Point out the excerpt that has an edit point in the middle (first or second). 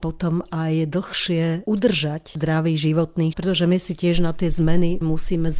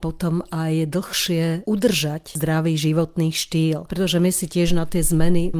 first